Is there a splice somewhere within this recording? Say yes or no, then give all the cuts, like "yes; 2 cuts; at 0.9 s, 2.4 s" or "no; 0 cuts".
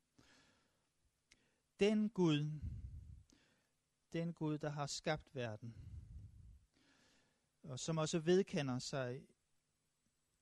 no; 0 cuts